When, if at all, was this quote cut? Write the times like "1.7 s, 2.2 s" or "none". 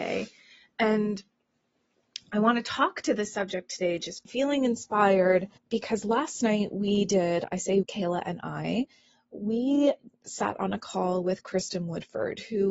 4.2 s, 5.6 s, 7.8 s